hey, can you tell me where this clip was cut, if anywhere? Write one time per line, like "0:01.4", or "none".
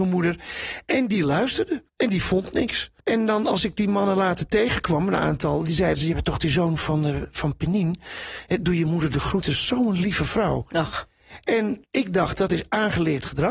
0:01.9
0:03.0
0:11.8